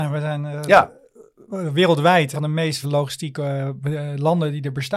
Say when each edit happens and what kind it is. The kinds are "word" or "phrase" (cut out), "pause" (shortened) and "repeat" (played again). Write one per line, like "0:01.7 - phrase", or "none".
0:02.3 - word
0:02.8 - word